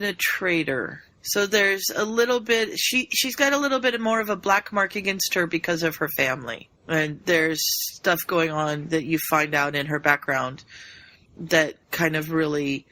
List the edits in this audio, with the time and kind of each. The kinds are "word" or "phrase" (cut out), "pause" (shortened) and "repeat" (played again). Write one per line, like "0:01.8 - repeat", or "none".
0:01.1 - pause
0:06.8 - pause
0:11.8 - pause